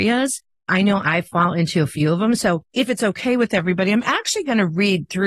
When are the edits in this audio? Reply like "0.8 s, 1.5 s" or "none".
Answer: none